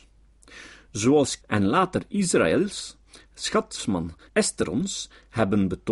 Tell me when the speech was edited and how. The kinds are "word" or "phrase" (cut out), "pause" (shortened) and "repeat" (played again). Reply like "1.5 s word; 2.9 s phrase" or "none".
1.4 s word; 4.3 s word